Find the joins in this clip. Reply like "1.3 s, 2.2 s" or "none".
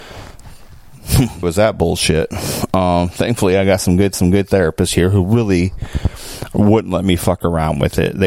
1.4 s, 4.1 s